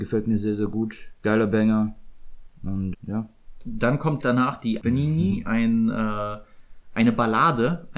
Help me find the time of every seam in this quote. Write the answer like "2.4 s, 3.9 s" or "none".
2.9 s, 4.2 s, 4.8 s

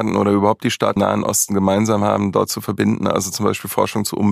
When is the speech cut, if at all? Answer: 1.0 s

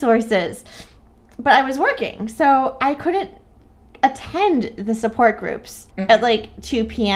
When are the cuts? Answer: 5.9 s

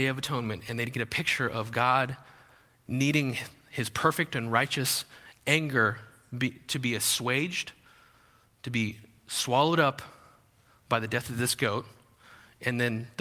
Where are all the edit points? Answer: none

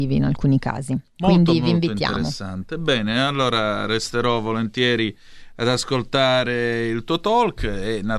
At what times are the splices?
none

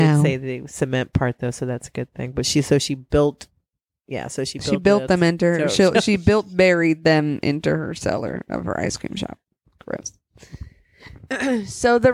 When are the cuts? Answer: none

